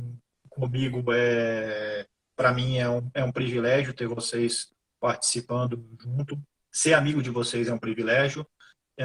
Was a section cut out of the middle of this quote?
yes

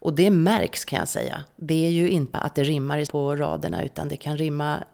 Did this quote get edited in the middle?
yes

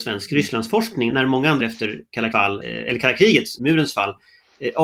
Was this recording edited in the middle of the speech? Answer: yes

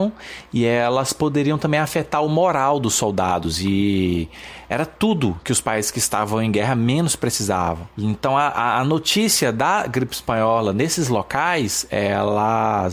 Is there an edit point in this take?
no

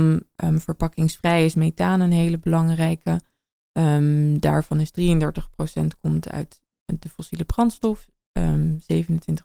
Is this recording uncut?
yes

